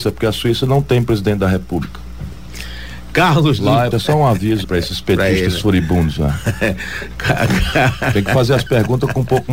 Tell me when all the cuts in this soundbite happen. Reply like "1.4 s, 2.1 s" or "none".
3.9 s, 4.6 s